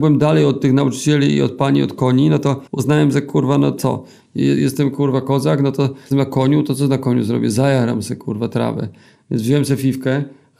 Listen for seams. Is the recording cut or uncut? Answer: cut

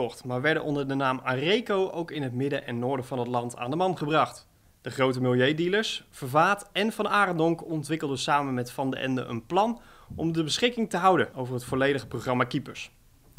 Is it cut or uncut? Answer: uncut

